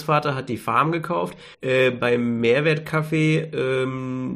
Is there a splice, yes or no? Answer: yes